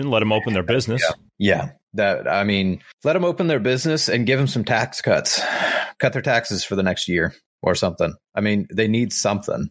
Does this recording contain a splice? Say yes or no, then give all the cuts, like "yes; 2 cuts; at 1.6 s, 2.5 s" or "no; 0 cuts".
no; 0 cuts